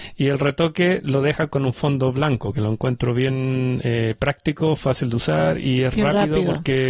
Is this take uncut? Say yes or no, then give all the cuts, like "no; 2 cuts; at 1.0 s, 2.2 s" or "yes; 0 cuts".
yes; 0 cuts